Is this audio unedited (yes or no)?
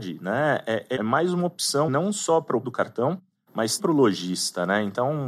no